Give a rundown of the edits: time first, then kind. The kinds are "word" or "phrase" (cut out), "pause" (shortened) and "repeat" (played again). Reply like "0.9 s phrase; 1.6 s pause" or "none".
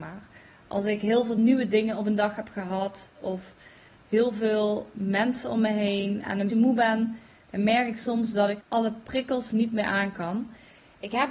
4.9 s word; 6.5 s word; 8.6 s word